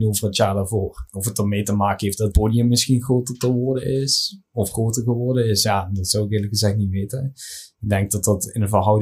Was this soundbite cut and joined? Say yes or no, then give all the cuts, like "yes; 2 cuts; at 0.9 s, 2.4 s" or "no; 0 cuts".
no; 0 cuts